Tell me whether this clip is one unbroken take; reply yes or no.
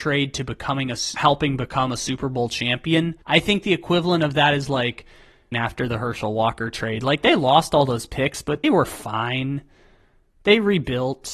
no